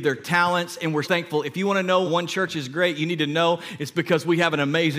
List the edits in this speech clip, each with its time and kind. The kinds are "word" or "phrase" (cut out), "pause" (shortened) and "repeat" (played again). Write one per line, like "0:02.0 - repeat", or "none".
0:01.0 - word
0:02.0 - word